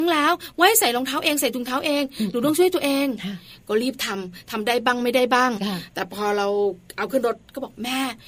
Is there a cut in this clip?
no; 0 cuts

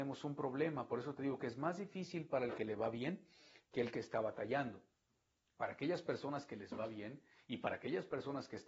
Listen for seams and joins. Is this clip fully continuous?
yes; 0 cuts

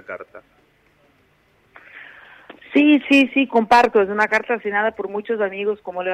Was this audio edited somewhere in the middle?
no; 0 cuts

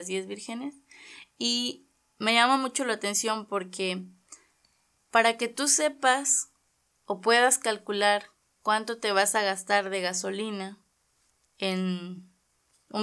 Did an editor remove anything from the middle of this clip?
no; 0 cuts

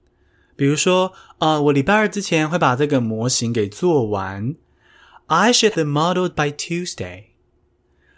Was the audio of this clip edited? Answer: yes; 2 cuts; at 5.7 s, 6.3 s

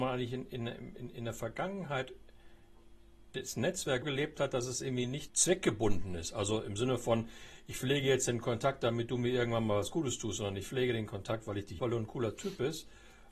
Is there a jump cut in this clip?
yes; 3 cuts; at 4.0 s, 5.3 s, 11.8 s

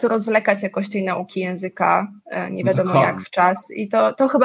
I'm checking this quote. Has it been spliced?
no; 0 cuts

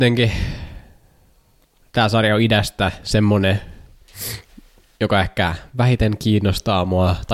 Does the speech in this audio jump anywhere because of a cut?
no; 0 cuts

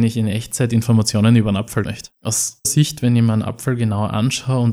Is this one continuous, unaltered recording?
no; 2 cuts; at 1.8 s, 2.6 s

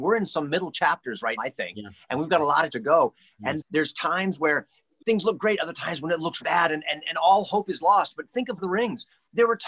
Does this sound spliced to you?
yes; 6 cuts; at 1.4 s, 2.7 s, 3.6 s, 5.0 s, 6.4 s, 8.6 s

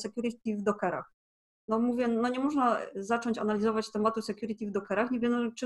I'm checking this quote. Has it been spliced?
no; 0 cuts

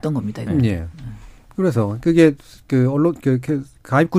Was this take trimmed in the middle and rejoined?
no; 0 cuts

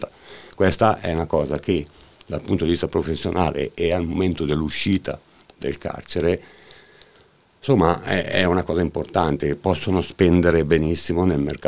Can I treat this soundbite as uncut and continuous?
yes; 0 cuts

